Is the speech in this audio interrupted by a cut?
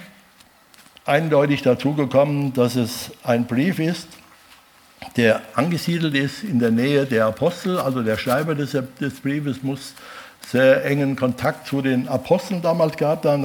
no; 0 cuts

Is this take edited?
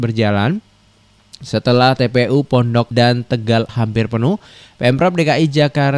yes; 2 cuts; at 2.9 s, 3.7 s

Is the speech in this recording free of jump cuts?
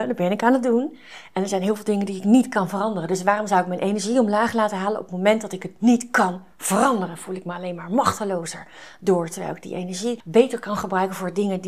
yes; 0 cuts

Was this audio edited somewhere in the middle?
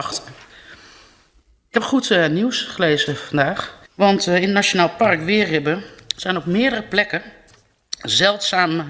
yes; 1 cut; at 3.9 s

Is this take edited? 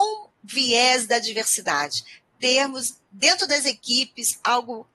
no; 0 cuts

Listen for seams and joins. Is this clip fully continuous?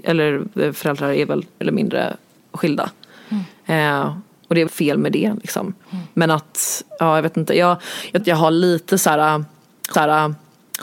no; 5 cuts; at 1.6 s, 4.7 s, 5.8 s, 8.2 s, 9.9 s

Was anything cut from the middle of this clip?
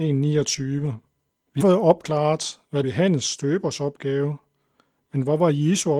yes; 3 cuts; at 1.3 s, 1.6 s, 2.8 s

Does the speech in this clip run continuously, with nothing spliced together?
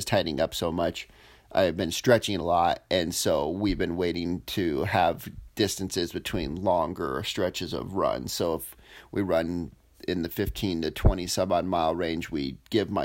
yes; 0 cuts

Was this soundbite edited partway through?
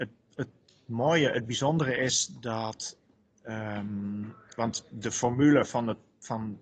no; 0 cuts

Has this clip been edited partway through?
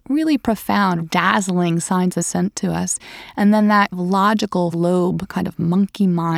yes; 4 cuts; at 1.0 s, 2.2 s, 3.9 s, 4.7 s

